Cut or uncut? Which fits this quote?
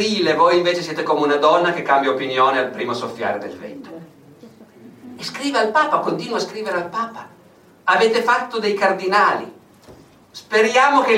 uncut